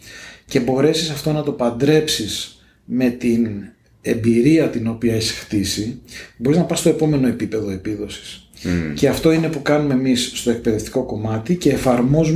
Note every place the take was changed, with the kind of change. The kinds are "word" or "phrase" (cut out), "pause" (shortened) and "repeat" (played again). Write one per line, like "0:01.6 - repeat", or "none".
none